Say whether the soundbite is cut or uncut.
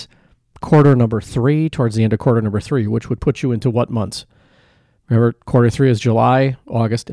uncut